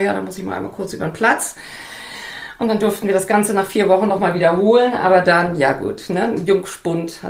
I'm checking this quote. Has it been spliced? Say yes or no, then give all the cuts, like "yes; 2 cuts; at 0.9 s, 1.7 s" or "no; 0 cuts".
no; 0 cuts